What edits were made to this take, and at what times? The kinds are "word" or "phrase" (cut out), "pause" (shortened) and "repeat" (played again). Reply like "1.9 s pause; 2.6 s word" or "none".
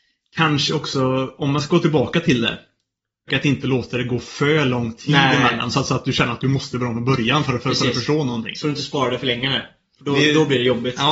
3.3 s word